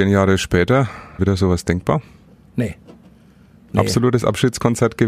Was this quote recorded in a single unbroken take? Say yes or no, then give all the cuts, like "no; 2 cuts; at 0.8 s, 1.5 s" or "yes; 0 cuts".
no; 1 cut; at 1.2 s